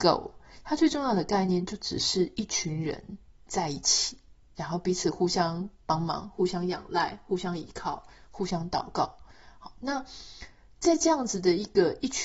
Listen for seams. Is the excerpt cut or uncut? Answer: cut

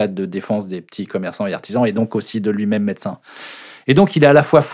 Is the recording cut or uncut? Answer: uncut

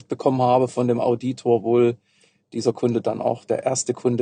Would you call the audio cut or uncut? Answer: uncut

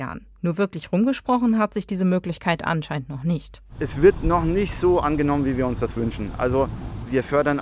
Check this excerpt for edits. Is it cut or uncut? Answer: cut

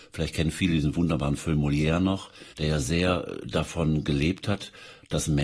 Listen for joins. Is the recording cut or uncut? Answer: cut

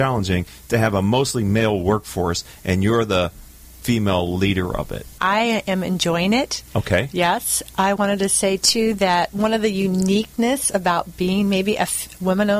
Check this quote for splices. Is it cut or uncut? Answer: uncut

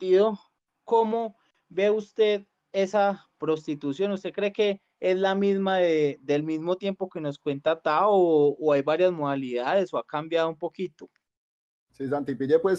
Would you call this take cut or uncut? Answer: uncut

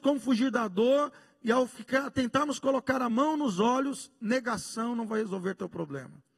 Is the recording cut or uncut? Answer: uncut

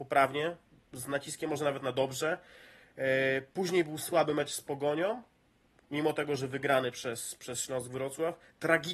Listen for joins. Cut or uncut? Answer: uncut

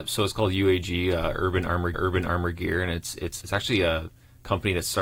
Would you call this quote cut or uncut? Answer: cut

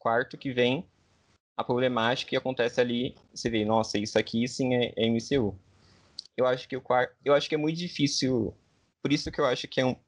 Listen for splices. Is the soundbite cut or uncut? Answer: uncut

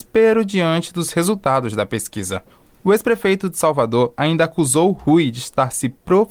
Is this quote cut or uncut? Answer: uncut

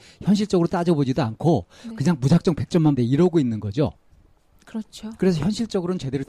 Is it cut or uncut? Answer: cut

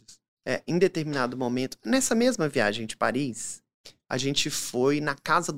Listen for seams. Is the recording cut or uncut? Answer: uncut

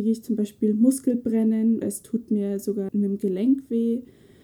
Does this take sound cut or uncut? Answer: cut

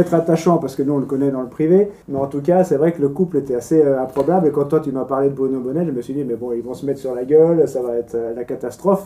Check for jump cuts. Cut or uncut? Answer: cut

